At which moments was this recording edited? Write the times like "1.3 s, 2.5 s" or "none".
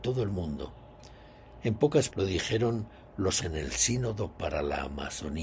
2.1 s, 3.4 s